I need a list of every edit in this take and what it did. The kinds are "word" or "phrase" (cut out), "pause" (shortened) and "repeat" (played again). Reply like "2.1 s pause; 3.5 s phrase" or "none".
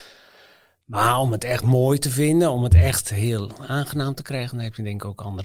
none